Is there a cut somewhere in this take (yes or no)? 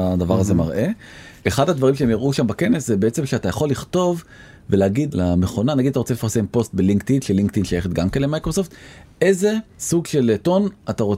no